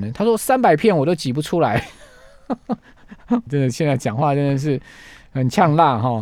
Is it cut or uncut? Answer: cut